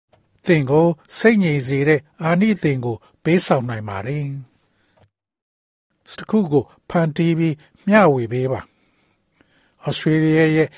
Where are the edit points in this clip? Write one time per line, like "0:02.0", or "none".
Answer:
0:06.2